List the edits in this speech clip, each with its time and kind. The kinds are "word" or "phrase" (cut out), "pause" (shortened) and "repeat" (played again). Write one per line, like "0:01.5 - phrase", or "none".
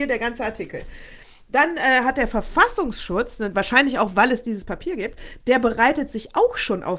none